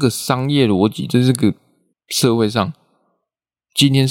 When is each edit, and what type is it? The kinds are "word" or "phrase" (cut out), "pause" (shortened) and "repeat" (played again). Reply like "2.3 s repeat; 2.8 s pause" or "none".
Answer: 1.9 s pause